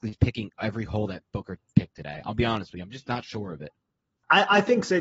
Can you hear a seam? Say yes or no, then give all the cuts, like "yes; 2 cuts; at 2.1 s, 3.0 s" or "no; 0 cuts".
no; 0 cuts